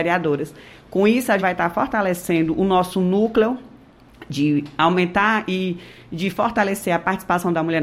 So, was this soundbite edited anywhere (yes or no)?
yes